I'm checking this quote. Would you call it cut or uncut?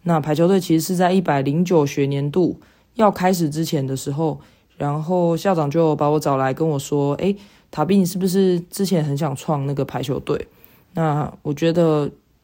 uncut